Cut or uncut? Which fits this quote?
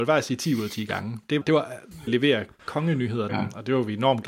cut